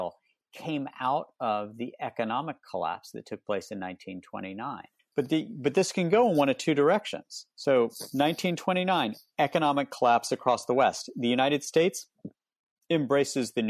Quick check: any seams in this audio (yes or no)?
yes